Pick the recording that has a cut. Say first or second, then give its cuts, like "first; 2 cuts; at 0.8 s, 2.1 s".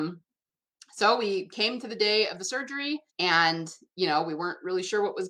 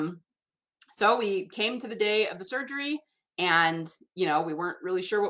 first; 1 cut; at 3.1 s